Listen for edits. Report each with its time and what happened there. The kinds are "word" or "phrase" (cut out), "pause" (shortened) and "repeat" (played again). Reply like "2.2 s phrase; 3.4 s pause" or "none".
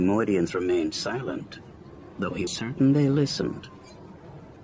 2.5 s word